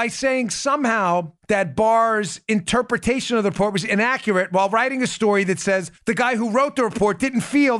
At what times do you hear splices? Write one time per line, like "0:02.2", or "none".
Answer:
0:01.4
0:06.0